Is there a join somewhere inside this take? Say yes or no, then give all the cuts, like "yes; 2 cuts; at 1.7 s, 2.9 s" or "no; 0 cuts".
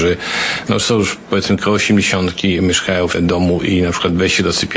yes; 1 cut; at 3.1 s